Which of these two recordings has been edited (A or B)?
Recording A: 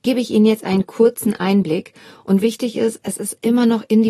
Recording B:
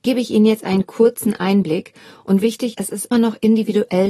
B